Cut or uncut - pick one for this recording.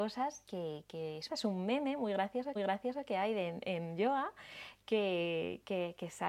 cut